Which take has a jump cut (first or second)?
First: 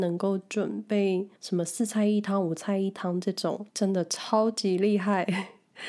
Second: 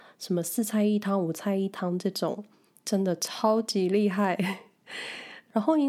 first